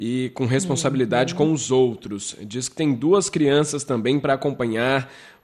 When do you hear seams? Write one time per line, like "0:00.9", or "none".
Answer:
none